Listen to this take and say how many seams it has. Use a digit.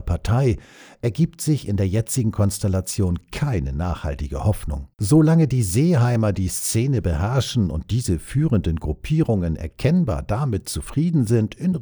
1